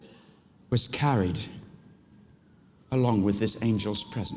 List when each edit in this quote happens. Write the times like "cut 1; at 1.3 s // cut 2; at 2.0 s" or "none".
none